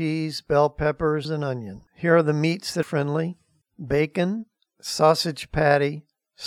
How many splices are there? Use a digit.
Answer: 4